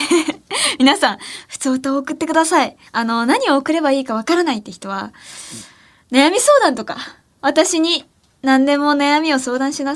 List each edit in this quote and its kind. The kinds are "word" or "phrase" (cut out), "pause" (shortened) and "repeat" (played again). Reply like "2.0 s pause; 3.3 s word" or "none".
2.9 s pause